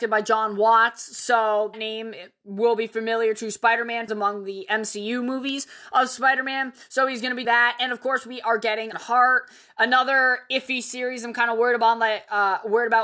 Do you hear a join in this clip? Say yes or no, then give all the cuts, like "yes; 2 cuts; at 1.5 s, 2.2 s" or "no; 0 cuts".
yes; 4 cuts; at 1.7 s, 4.1 s, 7.4 s, 8.9 s